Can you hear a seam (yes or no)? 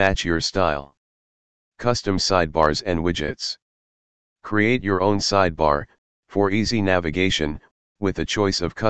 no